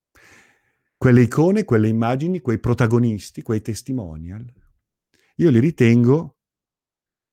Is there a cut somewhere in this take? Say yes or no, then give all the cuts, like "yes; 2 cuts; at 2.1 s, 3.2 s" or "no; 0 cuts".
no; 0 cuts